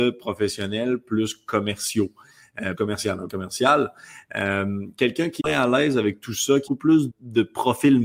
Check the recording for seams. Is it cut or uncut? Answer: cut